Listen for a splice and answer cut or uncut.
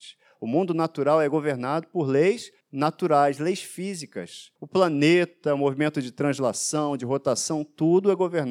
cut